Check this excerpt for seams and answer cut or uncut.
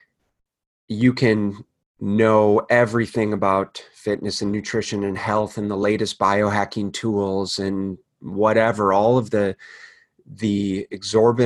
uncut